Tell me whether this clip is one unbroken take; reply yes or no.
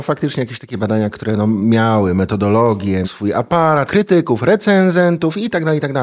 no